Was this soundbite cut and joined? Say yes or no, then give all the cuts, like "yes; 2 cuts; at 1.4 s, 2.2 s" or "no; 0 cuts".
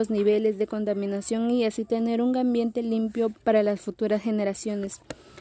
yes; 1 cut; at 3.4 s